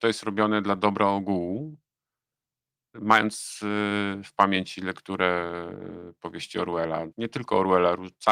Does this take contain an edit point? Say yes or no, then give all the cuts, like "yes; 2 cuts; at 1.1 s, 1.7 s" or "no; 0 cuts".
yes; 2 cuts; at 2.9 s, 7.1 s